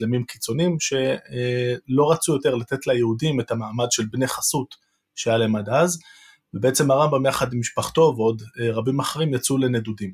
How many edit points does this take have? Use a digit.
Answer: 0